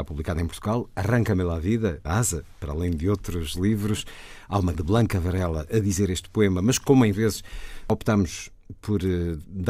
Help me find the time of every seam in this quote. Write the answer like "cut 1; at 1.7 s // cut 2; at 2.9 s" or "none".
cut 1; at 2.0 s // cut 2; at 4.7 s // cut 3; at 7.1 s